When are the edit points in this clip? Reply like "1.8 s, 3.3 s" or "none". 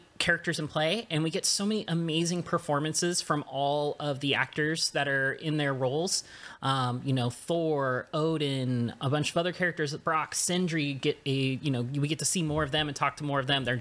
none

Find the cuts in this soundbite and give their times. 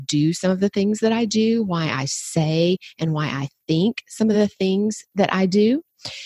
none

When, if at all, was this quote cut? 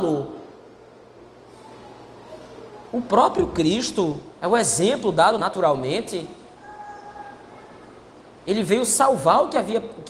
2.9 s, 4.3 s, 5.4 s

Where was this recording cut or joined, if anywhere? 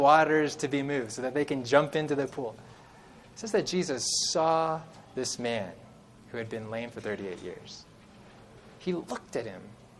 none

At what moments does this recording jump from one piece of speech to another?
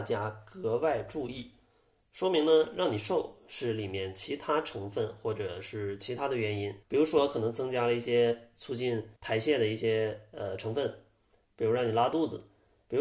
6.8 s, 9.2 s

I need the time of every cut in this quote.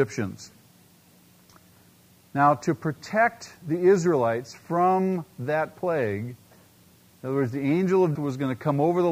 8.1 s

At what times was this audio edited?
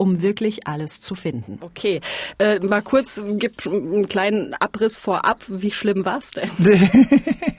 none

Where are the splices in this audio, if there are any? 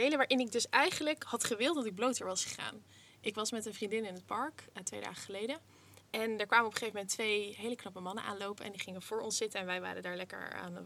none

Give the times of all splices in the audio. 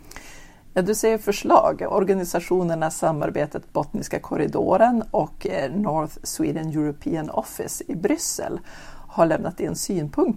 none

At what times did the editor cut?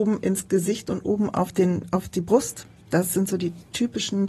none

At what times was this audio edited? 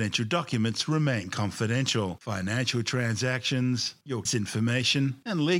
4.3 s

